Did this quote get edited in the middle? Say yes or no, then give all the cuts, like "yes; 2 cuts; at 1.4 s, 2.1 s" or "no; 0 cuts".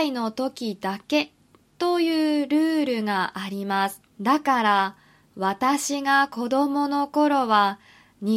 yes; 1 cut; at 4.1 s